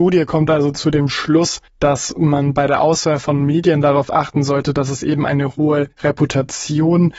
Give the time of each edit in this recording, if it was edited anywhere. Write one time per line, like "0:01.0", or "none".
0:01.7
0:05.9

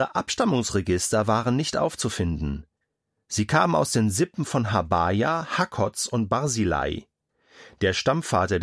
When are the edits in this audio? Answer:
none

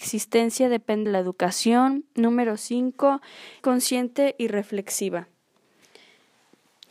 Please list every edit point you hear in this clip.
0:01.1
0:03.6

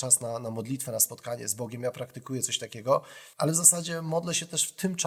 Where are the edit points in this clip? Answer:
0:03.3

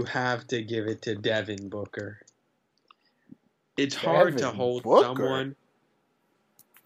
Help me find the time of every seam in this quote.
none

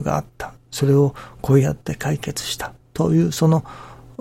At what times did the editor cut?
0:02.8

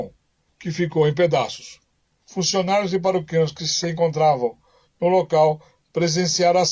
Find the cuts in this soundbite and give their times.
none

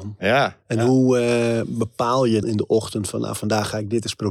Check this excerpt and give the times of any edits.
0:02.4

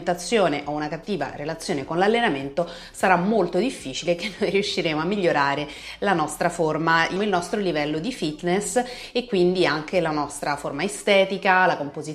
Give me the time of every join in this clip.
0:07.2

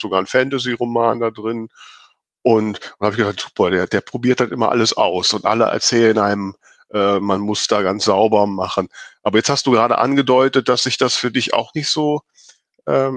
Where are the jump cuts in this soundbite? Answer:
none

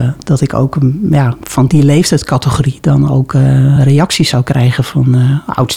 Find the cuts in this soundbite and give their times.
none

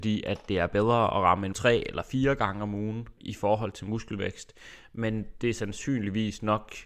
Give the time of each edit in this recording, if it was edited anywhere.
0:01.5
0:03.2

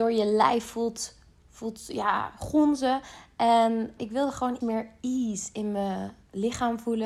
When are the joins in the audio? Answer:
0:04.0
0:04.6

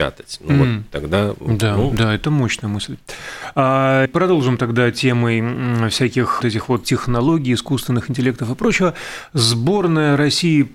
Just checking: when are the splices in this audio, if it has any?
0:02.2
0:04.1
0:06.4
0:06.8

